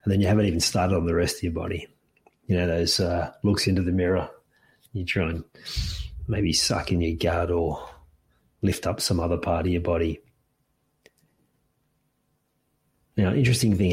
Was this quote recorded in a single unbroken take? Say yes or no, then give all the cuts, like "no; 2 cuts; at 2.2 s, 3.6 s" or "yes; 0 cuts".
yes; 0 cuts